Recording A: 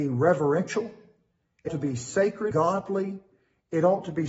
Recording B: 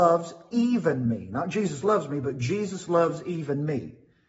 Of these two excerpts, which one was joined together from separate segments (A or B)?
A